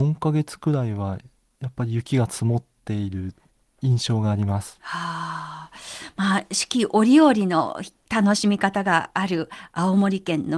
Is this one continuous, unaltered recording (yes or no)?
yes